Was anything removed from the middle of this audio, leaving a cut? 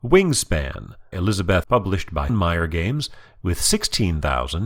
yes; 3 cuts; at 1.1 s, 1.6 s, 2.3 s

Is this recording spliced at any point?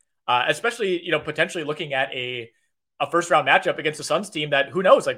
no; 0 cuts

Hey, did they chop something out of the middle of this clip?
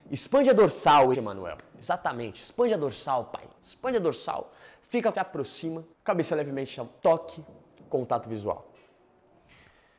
yes; 5 cuts; at 1.1 s, 3.6 s, 5.1 s, 5.9 s, 7.0 s

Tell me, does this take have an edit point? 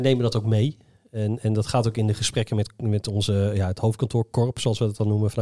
no; 0 cuts

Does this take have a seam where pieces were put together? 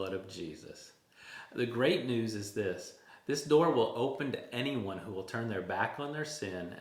no; 0 cuts

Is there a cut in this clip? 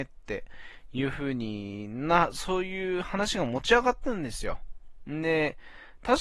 no; 0 cuts

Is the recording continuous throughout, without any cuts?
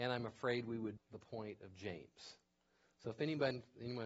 no; 1 cut; at 1.0 s

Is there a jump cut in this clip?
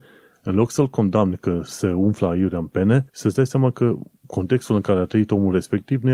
yes; 1 cut; at 3.1 s

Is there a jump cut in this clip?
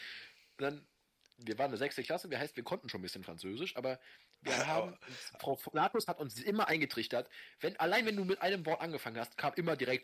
no; 0 cuts

